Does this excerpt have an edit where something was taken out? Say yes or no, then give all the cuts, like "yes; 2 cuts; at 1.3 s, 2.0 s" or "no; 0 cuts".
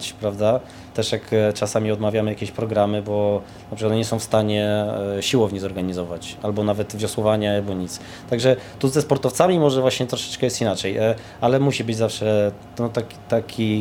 no; 0 cuts